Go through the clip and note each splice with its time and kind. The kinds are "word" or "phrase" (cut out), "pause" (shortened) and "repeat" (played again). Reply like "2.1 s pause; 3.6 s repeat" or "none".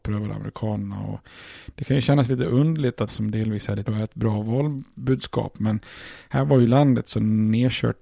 3.1 s phrase; 3.9 s word